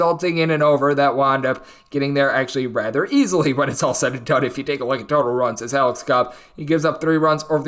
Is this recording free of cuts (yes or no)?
yes